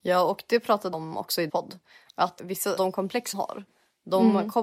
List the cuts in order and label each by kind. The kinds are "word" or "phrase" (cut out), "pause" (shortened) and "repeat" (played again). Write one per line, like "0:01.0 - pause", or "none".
0:00.9 - word
0:01.5 - word
0:02.4 - word
0:02.8 - word
0:03.3 - word